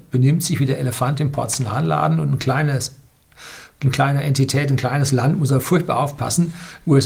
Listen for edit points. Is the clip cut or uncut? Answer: uncut